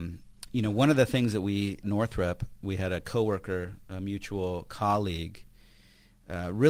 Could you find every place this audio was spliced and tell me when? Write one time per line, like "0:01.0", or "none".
0:01.8